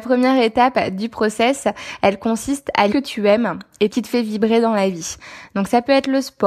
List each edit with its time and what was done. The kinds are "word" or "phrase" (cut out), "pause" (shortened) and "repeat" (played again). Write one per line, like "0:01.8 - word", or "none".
0:02.9 - phrase
0:03.9 - phrase